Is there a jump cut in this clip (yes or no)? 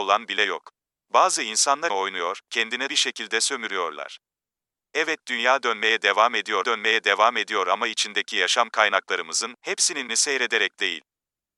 yes